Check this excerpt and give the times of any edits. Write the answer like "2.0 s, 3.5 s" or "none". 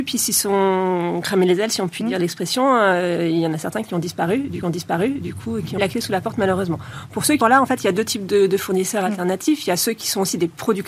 4.6 s, 5.8 s, 7.4 s